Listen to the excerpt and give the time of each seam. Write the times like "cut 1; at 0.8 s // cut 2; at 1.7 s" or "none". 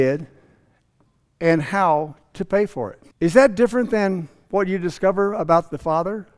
cut 1; at 3.1 s